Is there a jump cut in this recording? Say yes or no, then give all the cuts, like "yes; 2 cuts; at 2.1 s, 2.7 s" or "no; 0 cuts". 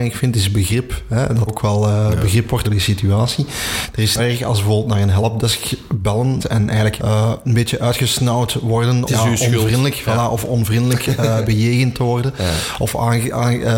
yes; 6 cuts; at 1.5 s, 2.6 s, 4.2 s, 6.4 s, 7.0 s, 9.1 s